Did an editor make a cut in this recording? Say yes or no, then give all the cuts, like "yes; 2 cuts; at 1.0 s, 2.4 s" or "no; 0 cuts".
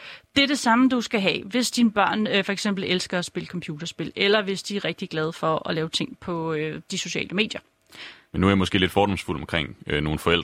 no; 0 cuts